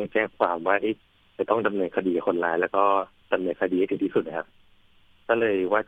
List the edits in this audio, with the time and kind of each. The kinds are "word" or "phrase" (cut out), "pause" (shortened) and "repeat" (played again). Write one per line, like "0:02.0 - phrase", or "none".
none